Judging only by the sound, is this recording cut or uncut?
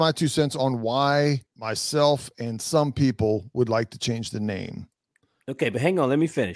cut